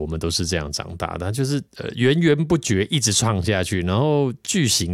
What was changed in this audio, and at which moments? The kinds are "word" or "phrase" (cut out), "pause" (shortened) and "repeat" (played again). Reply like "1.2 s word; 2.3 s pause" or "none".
1.7 s pause